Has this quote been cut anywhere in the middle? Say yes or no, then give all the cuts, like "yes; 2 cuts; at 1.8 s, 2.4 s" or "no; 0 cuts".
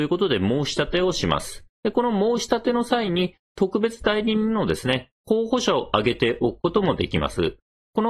yes; 1 cut; at 1.7 s